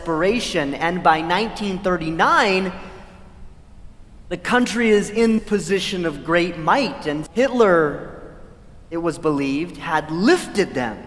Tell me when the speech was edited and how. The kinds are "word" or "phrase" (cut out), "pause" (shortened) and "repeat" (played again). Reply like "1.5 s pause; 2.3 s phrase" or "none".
5.4 s word; 7.3 s word